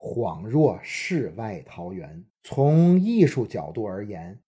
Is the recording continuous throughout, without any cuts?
no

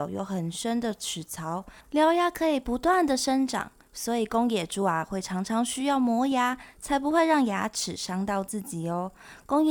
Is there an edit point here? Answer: yes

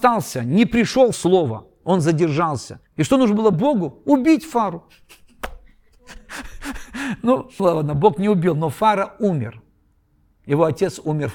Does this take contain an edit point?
yes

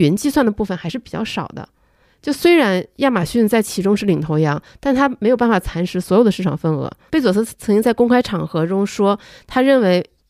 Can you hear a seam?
no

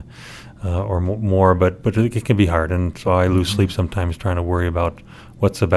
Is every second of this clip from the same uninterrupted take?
yes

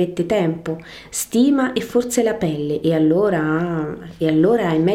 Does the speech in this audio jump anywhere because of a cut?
no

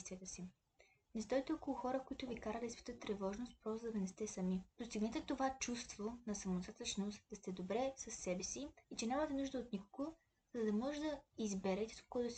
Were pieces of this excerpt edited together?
yes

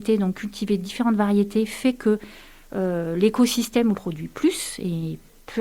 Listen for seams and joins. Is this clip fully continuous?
no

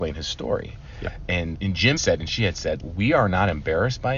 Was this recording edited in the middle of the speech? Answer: yes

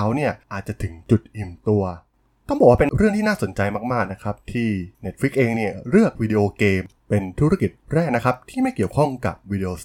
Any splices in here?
yes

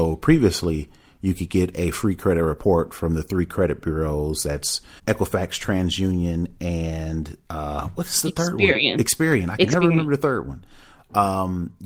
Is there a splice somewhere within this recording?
yes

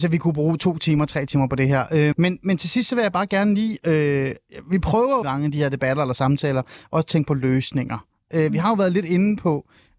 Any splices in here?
yes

